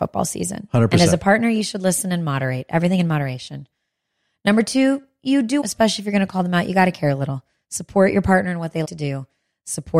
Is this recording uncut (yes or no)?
no